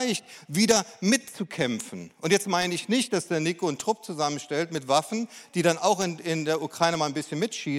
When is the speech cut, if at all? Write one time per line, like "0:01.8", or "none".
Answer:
none